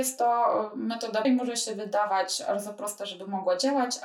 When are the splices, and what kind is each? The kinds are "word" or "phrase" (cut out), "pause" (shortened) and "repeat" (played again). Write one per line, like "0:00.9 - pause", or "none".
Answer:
0:01.2 - phrase